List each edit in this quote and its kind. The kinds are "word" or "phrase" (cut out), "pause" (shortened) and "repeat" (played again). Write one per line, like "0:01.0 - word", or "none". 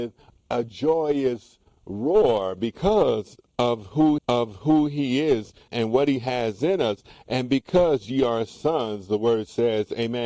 0:04.2 - repeat
0:05.7 - word

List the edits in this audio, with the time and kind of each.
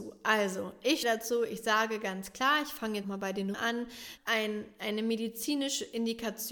0:01.0 - word
0:03.0 - word
0:03.5 - word
0:04.2 - phrase

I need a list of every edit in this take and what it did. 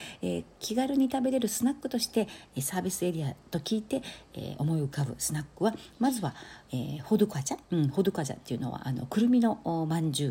0:07.6 - pause

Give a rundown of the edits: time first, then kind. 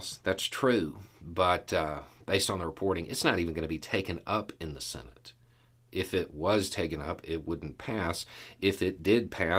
0:01.1 - pause

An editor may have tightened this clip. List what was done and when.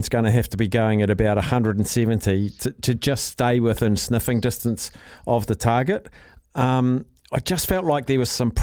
none

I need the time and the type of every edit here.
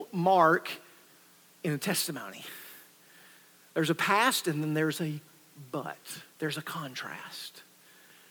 0:06.3 - pause

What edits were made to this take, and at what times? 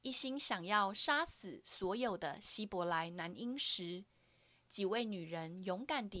none

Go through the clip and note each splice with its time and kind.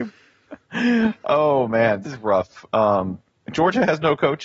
0:02.0 - word
0:03.2 - pause

